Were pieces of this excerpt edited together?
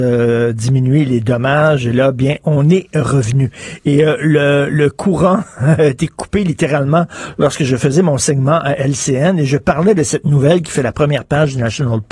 no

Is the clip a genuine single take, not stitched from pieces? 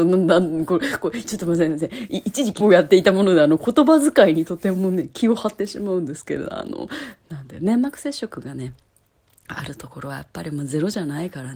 no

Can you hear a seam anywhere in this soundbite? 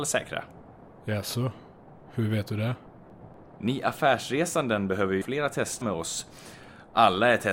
yes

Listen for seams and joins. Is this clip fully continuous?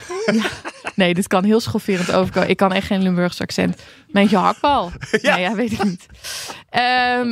yes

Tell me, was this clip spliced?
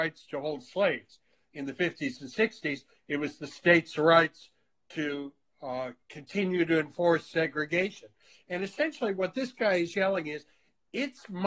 no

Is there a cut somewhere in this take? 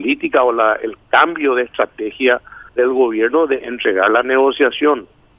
yes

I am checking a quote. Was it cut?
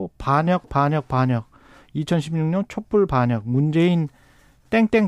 no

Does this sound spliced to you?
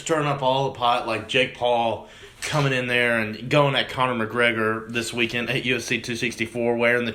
no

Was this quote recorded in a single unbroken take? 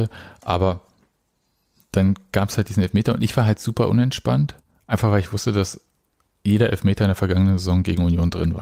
yes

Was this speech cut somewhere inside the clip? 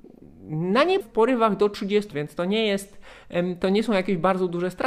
yes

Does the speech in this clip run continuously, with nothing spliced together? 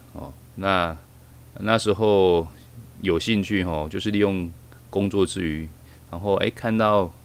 yes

